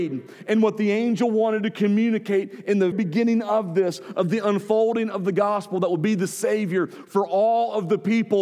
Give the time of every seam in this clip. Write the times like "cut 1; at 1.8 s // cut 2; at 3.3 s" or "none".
cut 1; at 2.9 s